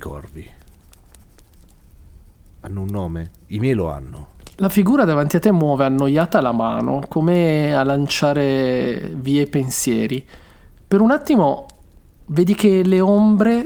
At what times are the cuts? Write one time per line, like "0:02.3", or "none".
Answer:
none